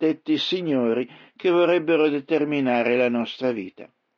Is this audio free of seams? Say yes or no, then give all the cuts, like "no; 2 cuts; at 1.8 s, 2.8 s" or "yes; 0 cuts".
yes; 0 cuts